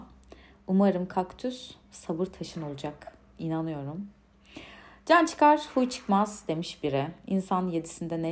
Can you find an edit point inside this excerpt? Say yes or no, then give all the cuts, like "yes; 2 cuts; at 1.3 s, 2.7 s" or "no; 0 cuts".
no; 0 cuts